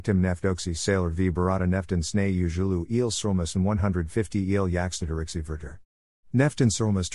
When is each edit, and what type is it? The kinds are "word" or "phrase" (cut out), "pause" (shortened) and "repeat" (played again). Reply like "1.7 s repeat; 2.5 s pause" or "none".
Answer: none